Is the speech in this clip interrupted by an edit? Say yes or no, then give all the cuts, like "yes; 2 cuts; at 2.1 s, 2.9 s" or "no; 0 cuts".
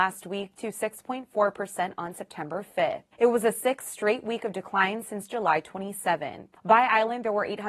yes; 2 cuts; at 3.1 s, 6.6 s